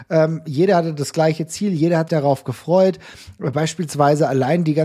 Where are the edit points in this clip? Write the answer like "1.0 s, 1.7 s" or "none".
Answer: 2.1 s